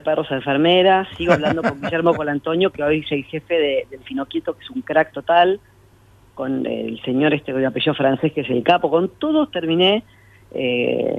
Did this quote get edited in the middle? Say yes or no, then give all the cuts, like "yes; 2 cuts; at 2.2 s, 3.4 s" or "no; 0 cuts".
no; 0 cuts